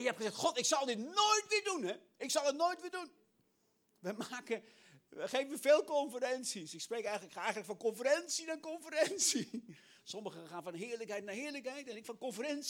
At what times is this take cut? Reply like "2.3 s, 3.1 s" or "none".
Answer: none